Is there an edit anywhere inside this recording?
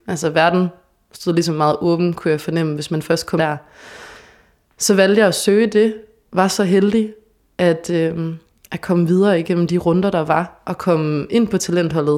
yes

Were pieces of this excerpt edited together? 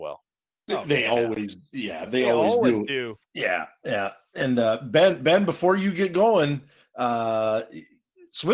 no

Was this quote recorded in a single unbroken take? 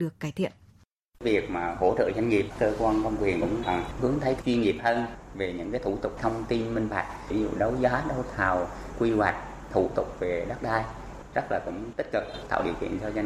no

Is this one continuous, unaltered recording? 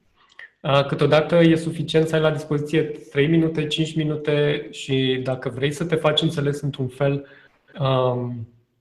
yes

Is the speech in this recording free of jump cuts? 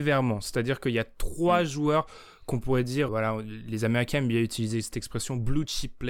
no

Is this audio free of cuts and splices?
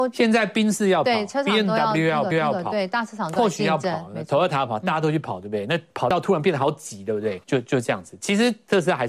no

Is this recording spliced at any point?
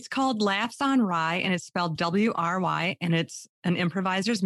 no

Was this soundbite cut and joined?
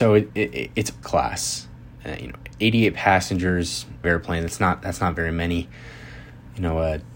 yes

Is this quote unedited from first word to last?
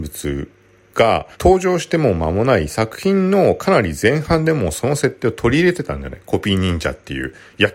no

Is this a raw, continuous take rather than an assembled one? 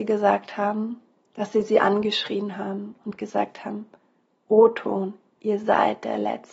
yes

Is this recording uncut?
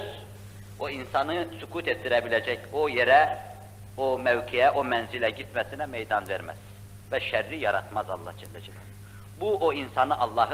yes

